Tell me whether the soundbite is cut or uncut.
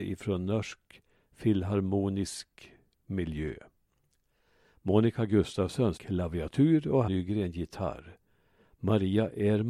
cut